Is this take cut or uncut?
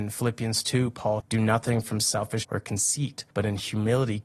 cut